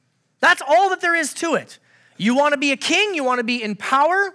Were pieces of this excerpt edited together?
no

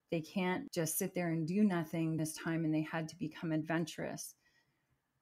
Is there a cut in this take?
yes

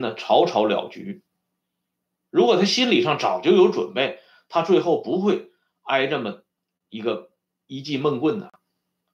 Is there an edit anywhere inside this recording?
no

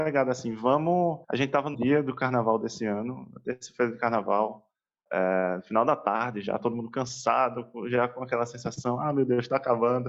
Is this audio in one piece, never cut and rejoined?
no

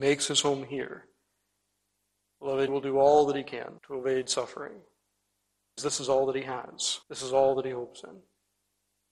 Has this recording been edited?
yes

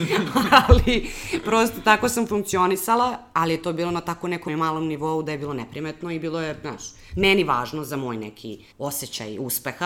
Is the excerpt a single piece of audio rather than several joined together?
no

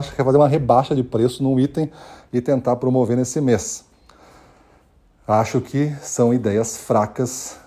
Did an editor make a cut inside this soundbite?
no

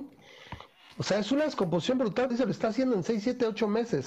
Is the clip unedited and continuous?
no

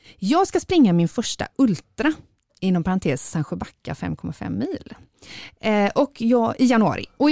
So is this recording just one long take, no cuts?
yes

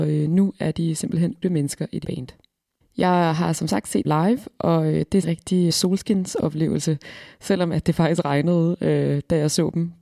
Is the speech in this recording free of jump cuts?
no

